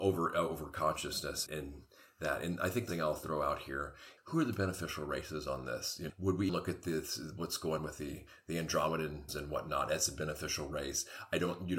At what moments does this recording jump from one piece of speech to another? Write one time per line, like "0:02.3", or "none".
0:01.5
0:02.9
0:04.2
0:06.1
0:06.5
0:07.8
0:09.3